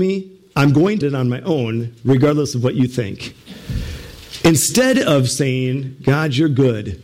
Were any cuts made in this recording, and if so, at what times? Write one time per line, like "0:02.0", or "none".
0:01.0